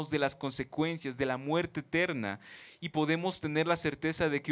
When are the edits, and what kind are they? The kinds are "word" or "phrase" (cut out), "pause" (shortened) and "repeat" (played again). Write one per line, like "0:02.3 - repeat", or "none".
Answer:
none